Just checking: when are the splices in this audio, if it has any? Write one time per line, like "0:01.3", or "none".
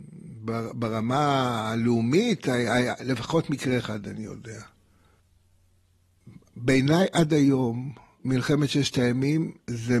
none